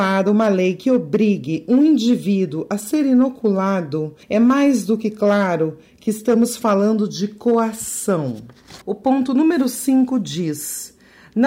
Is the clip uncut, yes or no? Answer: no